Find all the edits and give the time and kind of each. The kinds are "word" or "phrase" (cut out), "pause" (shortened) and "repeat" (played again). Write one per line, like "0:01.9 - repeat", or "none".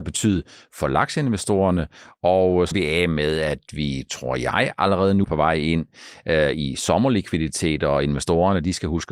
0:02.7 - word
0:05.2 - word